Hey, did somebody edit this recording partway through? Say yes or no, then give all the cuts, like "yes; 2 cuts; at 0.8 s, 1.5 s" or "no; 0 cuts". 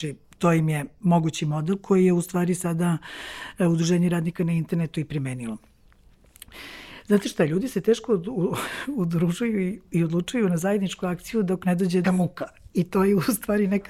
yes; 1 cut; at 12.0 s